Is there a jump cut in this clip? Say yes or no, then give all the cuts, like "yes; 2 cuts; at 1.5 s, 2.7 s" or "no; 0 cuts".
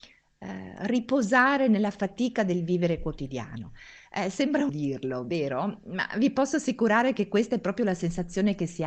yes; 1 cut; at 4.7 s